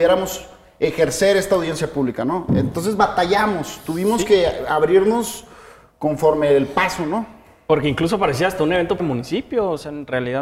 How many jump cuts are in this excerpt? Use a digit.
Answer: 1